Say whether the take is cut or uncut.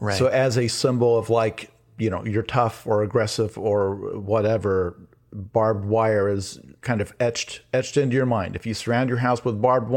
cut